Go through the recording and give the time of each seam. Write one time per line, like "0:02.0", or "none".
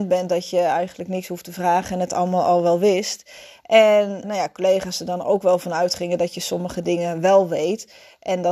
0:04.2